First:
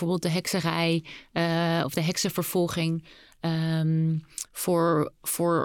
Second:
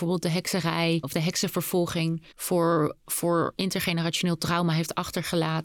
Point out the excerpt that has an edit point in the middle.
second; 2 cuts; at 1.0 s, 2.3 s

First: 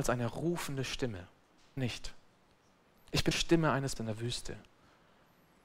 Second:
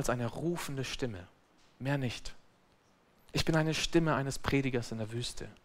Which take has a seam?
first; 3 cuts; at 1.8 s, 3.3 s, 4.0 s

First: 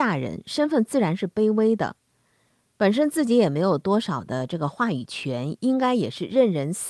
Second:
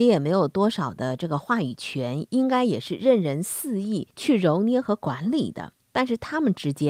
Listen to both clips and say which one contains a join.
second; 2 cuts; at 4.1 s, 5.8 s

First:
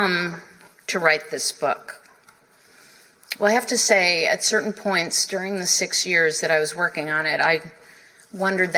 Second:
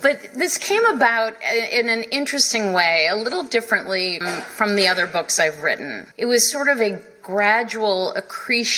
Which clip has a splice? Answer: second; 2 cuts; at 4.2 s, 6.1 s

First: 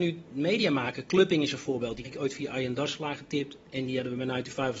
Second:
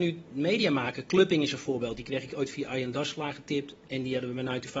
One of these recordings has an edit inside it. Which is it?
first; 1 cut; at 2.0 s

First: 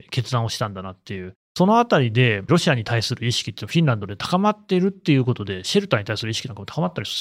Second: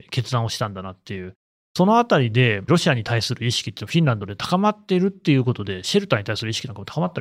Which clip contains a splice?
first; 1 cut; at 1.4 s

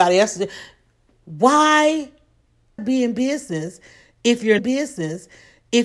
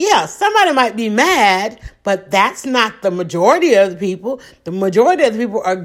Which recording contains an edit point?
first; 2 cuts; at 2.8 s, 4.6 s

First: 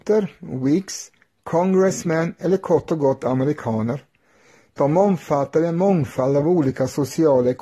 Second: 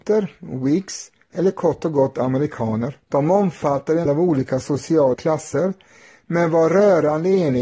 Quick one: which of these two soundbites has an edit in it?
second; 4 cuts; at 1.3 s, 3.0 s, 4.1 s, 5.1 s

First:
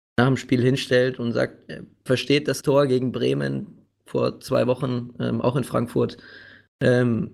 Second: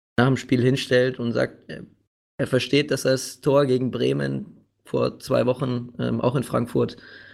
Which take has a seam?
first; 2 cuts; at 2.1 s, 2.6 s

